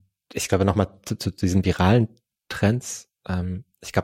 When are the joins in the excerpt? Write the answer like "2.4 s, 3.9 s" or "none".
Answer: none